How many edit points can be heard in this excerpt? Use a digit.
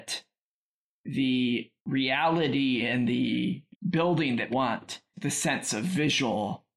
4